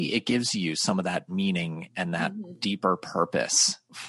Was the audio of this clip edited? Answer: no; 0 cuts

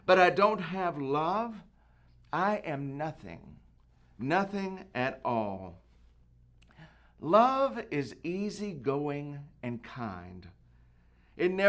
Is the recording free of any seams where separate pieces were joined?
yes; 0 cuts

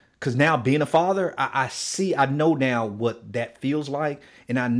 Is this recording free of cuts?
yes; 0 cuts

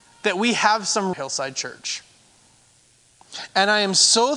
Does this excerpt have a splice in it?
yes; 1 cut; at 1.1 s

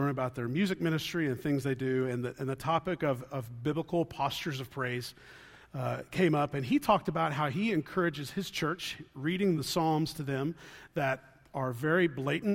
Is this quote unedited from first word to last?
yes; 0 cuts

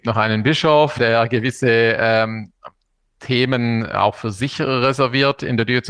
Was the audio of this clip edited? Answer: yes; 1 cut; at 1.0 s

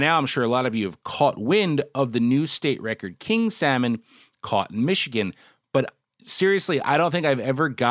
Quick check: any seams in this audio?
no; 0 cuts

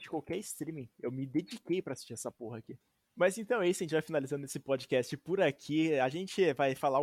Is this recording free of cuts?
yes; 0 cuts

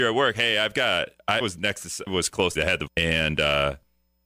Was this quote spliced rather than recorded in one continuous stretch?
yes; 4 cuts; at 1.4 s, 2.1 s, 2.6 s, 2.9 s

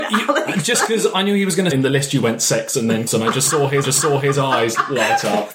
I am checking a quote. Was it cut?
yes; 3 cuts; at 1.7 s, 3.1 s, 3.8 s

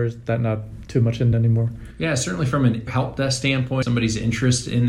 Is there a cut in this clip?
yes; 3 cuts; at 1.3 s, 2.9 s, 3.8 s

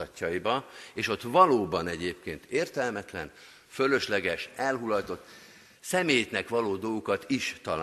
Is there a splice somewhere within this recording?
no; 0 cuts

